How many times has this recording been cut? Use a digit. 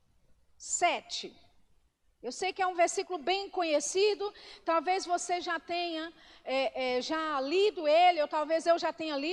0